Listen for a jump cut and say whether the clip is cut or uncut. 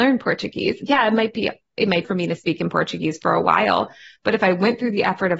cut